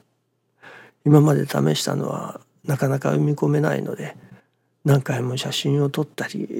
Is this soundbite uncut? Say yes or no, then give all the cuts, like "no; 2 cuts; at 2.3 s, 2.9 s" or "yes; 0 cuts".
yes; 0 cuts